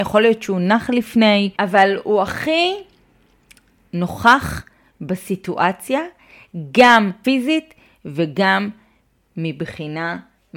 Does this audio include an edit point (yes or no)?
yes